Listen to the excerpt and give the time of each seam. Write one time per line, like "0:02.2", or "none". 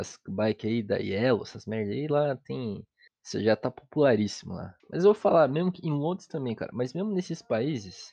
0:03.1
0:04.8